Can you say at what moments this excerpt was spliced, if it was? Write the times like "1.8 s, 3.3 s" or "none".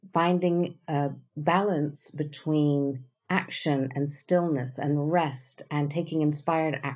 1.3 s